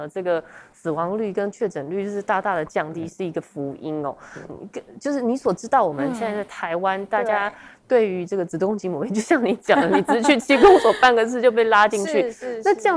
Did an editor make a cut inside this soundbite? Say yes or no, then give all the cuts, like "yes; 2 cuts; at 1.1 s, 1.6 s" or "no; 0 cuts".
yes; 1 cut; at 4.5 s